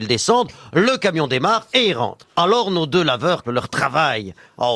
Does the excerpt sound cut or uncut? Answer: cut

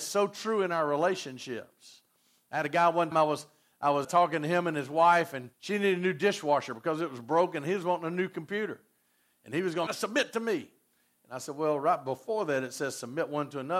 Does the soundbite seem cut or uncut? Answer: cut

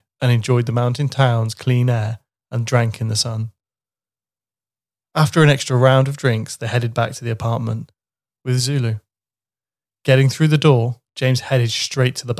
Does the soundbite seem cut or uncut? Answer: uncut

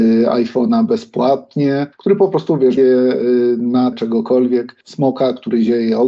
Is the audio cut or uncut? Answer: cut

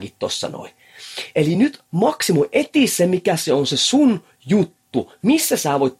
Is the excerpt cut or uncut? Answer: uncut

